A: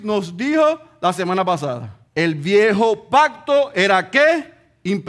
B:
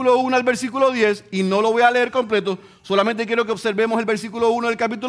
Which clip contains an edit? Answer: A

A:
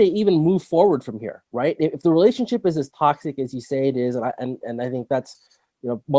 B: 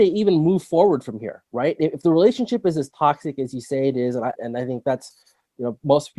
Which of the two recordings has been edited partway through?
B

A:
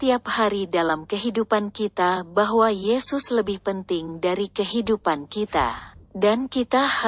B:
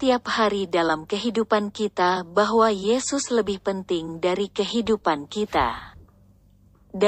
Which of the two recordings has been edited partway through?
A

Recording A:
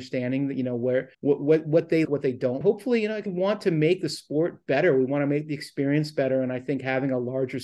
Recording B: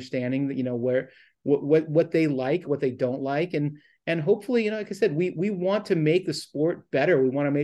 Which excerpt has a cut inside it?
A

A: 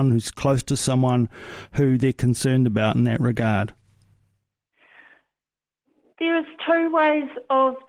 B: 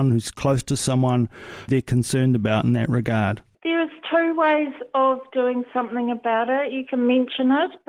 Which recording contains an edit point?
B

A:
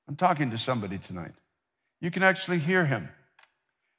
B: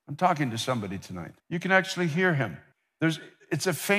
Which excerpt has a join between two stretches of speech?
B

